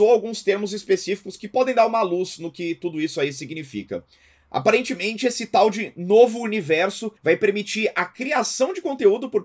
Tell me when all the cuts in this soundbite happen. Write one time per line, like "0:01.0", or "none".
0:07.2